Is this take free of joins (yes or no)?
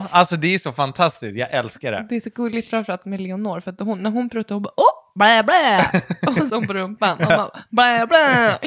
no